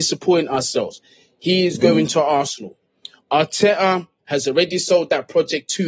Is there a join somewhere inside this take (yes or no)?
no